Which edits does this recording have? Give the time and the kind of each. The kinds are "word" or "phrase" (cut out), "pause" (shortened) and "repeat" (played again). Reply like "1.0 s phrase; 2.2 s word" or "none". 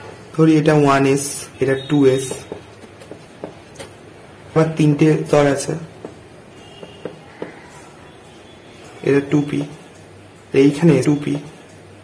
1.5 s pause; 4.6 s word; 5.3 s word; 11.0 s repeat